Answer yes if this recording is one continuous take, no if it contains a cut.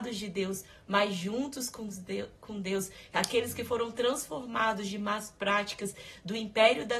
yes